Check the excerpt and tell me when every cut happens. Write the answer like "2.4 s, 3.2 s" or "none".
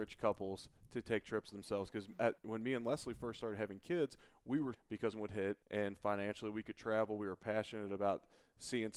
2.4 s, 4.7 s, 5.1 s, 5.6 s

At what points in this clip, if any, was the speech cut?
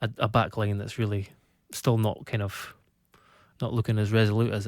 none

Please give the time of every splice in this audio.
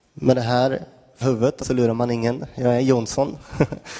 1.2 s, 1.6 s

